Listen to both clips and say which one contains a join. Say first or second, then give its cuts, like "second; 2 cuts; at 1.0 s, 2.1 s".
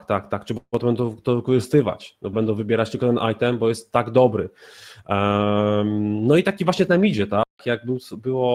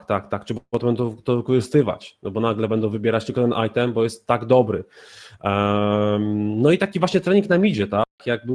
first; 2 cuts; at 2.3 s, 6.9 s